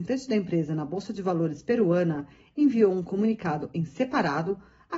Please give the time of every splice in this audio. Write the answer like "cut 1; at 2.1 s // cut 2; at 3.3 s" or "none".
none